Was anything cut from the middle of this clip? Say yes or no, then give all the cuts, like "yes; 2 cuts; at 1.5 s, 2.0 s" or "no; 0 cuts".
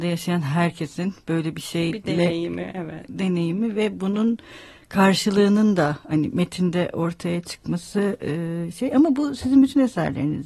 no; 0 cuts